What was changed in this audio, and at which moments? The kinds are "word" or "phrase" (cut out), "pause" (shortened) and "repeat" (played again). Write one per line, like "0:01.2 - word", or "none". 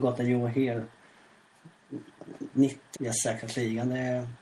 0:02.5 - word
0:02.9 - word